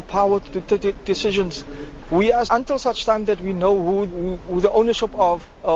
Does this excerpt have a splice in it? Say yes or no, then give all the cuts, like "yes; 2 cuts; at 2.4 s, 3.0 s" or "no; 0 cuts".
yes; 3 cuts; at 1.1 s, 2.5 s, 4.1 s